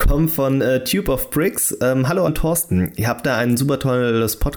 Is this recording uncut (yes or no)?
no